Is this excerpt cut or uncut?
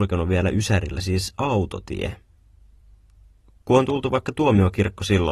uncut